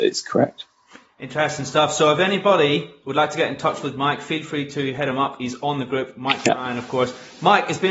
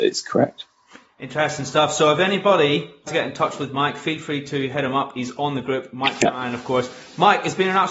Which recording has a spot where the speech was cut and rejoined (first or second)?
second